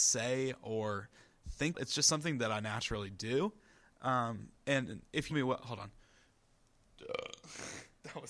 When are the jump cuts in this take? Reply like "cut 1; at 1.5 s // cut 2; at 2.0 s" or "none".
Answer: cut 1; at 1.7 s // cut 2; at 5.3 s